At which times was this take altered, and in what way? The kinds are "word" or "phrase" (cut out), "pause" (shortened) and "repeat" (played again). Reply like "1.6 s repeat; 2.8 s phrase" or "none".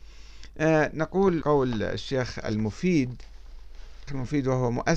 1.4 s word; 4.1 s word